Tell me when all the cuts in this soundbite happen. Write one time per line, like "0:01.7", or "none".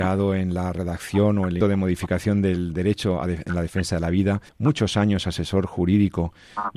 0:01.6
0:04.5